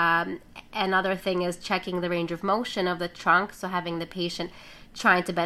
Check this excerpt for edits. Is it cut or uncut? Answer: uncut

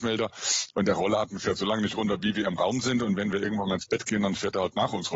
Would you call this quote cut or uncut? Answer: uncut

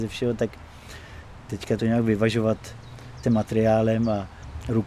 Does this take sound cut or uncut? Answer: cut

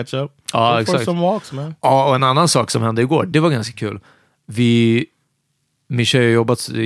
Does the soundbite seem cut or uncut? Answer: uncut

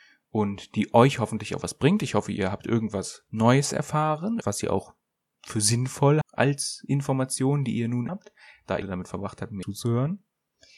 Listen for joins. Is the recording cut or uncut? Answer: cut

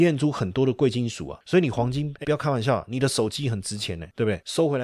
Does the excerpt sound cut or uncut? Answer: cut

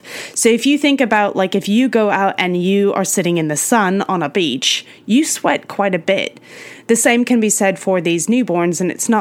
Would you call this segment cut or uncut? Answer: uncut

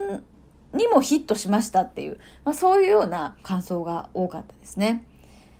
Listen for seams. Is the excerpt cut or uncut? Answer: cut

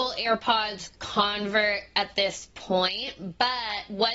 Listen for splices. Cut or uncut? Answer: uncut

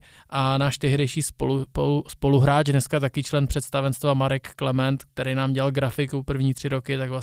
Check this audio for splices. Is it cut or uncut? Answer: uncut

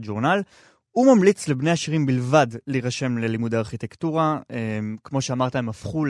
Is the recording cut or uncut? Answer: uncut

